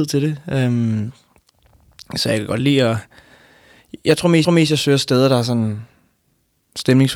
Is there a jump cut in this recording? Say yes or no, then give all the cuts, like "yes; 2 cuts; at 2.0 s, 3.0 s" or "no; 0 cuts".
yes; 1 cut; at 4.4 s